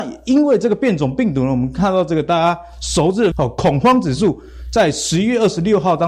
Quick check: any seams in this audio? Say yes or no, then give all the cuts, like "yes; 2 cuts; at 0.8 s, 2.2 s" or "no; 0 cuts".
yes; 1 cut; at 3.3 s